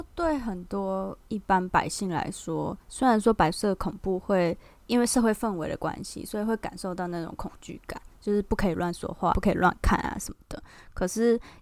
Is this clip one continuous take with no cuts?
no; 2 cuts; at 2.8 s, 9.3 s

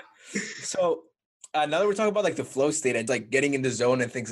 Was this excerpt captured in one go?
no; 1 cut; at 3.1 s

